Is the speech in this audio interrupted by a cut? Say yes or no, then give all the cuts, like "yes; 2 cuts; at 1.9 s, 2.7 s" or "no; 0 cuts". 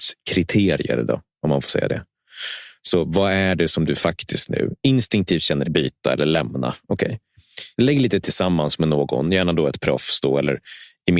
yes; 3 cuts; at 5.6 s, 7.7 s, 8.2 s